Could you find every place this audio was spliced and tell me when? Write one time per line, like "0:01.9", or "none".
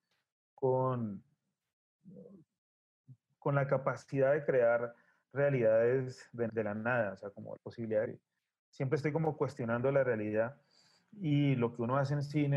0:03.3
0:06.5
0:07.6
0:08.0